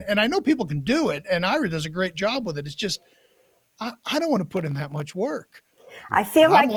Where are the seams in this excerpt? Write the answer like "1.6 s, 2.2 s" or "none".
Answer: none

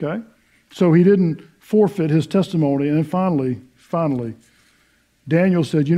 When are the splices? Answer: none

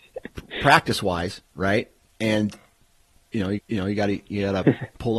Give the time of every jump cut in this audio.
3.6 s

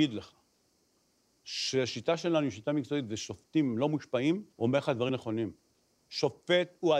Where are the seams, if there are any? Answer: 4.5 s, 5.1 s

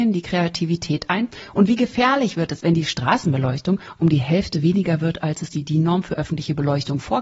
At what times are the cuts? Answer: 2.6 s

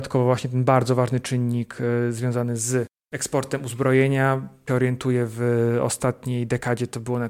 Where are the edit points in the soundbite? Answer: 4.7 s

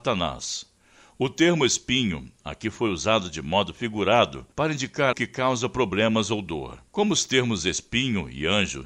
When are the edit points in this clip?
4.5 s, 5.1 s

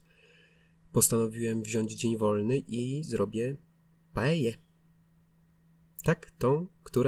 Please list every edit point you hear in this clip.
none

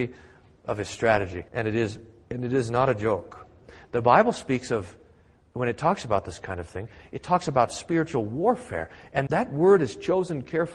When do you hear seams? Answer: 1.5 s, 9.3 s

